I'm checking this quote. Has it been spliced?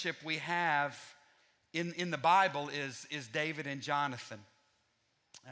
no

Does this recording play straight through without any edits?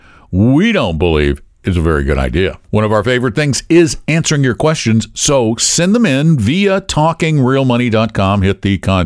no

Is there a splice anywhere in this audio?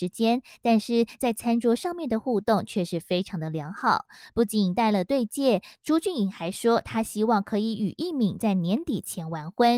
no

